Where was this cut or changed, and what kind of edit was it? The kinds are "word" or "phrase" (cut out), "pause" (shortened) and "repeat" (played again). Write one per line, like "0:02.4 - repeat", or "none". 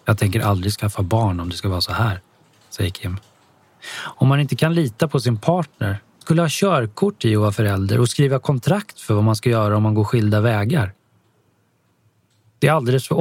0:06.2 - word